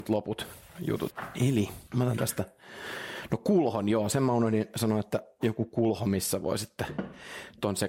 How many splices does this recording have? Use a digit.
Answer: 0